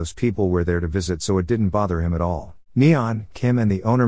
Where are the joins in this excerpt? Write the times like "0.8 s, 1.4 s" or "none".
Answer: 2.6 s